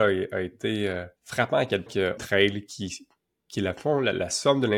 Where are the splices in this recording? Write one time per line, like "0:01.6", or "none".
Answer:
0:01.2
0:01.9
0:02.2